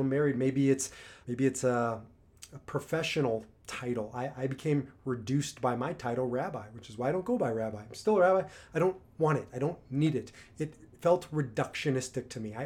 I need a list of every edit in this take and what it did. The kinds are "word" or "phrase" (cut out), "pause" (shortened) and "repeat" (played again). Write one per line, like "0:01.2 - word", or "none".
0:01.2 - word